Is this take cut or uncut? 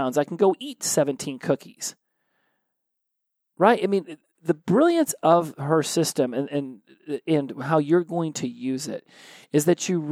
uncut